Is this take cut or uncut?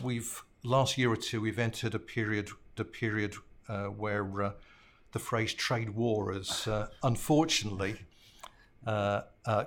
cut